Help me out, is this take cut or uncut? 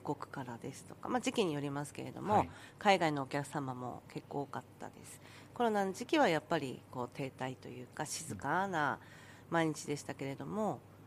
uncut